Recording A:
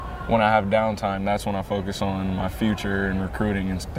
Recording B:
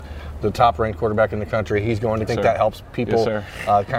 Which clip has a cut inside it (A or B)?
B